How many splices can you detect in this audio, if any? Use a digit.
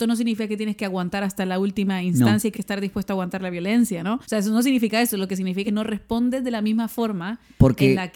3